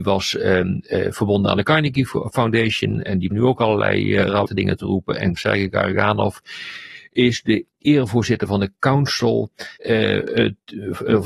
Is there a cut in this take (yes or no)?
yes